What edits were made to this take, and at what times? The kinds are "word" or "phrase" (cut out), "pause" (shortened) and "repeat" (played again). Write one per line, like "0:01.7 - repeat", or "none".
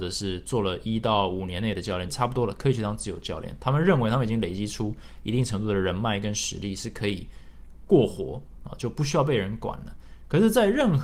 0:02.1 - phrase